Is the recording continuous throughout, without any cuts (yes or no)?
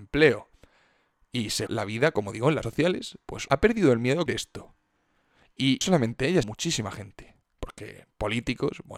no